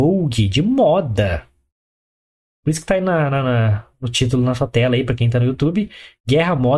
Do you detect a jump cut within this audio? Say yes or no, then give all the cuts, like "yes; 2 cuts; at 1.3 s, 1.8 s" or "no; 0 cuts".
no; 0 cuts